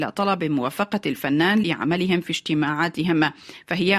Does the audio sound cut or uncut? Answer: cut